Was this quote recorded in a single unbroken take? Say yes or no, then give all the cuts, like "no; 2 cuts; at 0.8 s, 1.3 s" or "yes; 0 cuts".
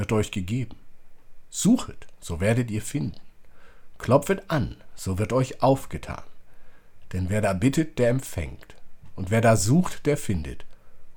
yes; 0 cuts